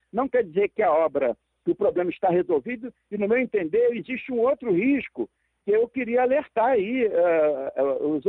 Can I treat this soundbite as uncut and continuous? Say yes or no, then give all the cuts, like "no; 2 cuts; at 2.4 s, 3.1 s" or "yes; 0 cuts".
yes; 0 cuts